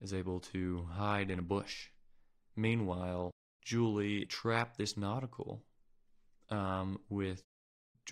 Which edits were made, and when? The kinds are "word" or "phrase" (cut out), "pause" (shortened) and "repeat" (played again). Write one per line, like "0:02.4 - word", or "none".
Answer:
0:04.2 - phrase